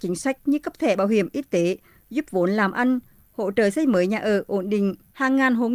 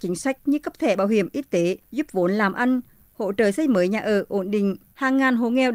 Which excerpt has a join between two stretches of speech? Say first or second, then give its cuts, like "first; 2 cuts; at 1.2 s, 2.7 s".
second; 1 cut; at 1.8 s